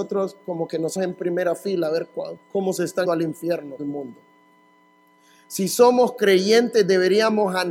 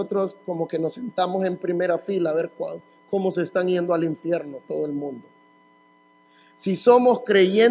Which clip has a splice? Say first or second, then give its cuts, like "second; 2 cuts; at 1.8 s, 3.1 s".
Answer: first; 4 cuts; at 1.0 s, 2.4 s, 3.0 s, 3.8 s